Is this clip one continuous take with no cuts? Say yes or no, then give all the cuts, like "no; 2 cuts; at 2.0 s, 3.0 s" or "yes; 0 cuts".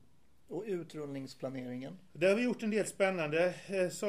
yes; 0 cuts